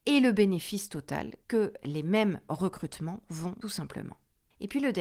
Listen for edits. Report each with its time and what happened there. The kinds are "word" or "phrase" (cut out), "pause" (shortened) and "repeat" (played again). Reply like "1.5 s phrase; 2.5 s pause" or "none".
1.4 s pause; 3.6 s phrase